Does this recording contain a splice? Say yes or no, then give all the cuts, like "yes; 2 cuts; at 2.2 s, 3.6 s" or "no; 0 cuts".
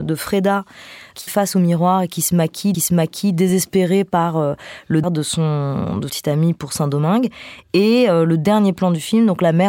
yes; 4 cuts; at 1.3 s, 2.7 s, 5.0 s, 6.1 s